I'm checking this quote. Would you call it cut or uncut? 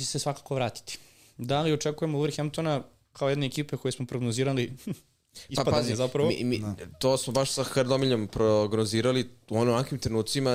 uncut